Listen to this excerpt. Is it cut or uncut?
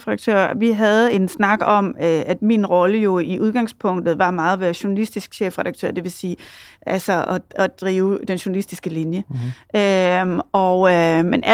uncut